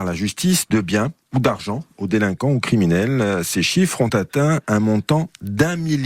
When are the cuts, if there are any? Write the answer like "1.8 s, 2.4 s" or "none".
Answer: none